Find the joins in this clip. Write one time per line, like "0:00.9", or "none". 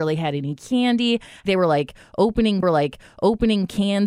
0:01.5
0:02.6